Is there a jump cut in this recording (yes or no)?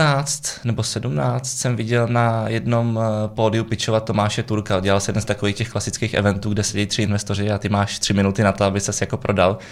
no